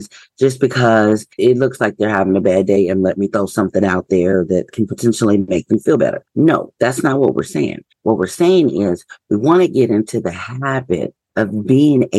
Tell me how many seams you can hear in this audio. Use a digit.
4